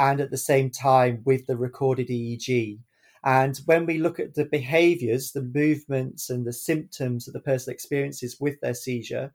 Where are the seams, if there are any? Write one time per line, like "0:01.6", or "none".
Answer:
none